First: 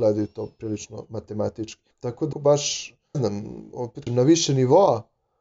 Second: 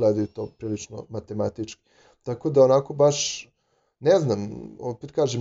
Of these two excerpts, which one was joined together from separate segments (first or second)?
first